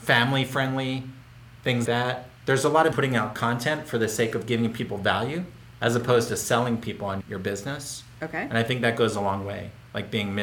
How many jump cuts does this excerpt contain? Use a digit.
4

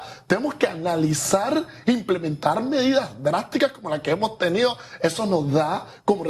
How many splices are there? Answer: 0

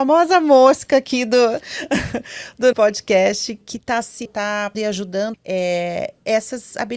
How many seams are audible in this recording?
5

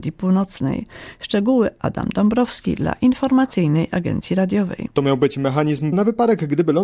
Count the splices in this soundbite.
2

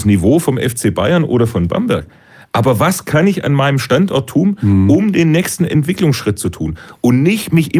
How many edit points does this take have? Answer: 0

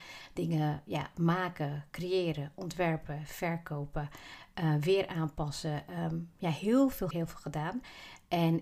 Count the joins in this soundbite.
1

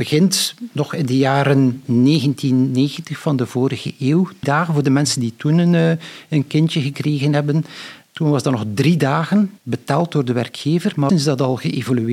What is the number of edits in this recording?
3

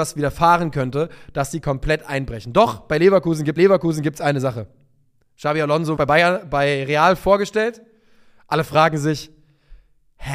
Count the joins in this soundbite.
2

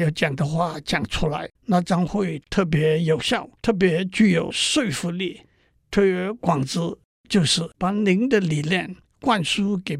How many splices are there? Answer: 2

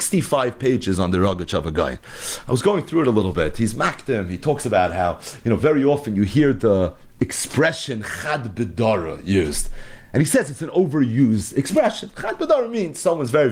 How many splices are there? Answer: 0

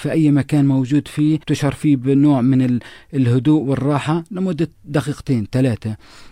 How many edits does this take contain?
2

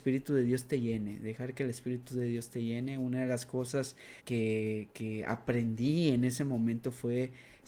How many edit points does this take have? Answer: 1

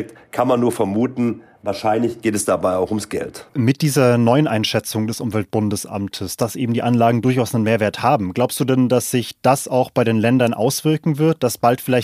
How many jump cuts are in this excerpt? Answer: 1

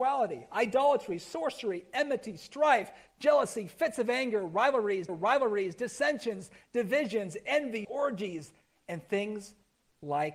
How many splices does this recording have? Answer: 2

